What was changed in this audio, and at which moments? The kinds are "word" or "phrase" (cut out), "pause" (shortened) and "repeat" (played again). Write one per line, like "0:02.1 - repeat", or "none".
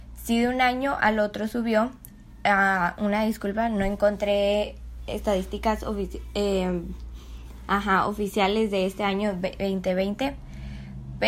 none